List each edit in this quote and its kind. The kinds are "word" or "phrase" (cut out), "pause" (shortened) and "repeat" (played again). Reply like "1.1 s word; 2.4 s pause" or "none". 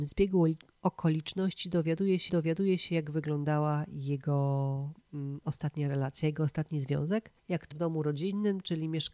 2.3 s repeat; 7.4 s pause; 7.7 s word